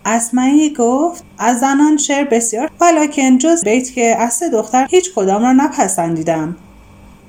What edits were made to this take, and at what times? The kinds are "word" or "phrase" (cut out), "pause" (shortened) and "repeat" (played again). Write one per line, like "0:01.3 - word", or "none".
0:01.3 - pause
0:02.7 - word
0:03.6 - word
0:04.9 - word